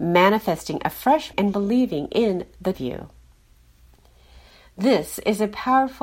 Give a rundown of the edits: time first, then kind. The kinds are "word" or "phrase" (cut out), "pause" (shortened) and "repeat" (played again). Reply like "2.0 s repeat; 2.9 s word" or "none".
1.3 s word; 2.7 s phrase